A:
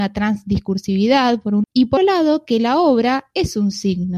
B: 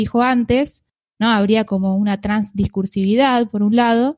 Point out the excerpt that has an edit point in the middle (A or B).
A